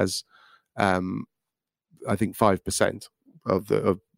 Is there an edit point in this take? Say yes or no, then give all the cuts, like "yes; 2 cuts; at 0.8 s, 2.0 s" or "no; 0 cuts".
no; 0 cuts